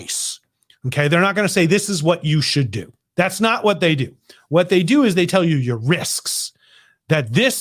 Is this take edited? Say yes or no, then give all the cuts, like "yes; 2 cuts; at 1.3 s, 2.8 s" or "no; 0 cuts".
no; 0 cuts